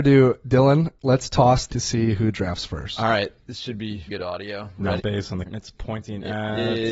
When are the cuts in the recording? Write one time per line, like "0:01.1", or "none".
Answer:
0:01.7
0:04.1
0:05.0
0:05.5